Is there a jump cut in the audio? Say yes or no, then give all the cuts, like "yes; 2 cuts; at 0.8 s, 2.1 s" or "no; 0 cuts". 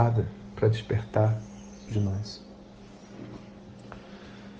yes; 1 cut; at 1.9 s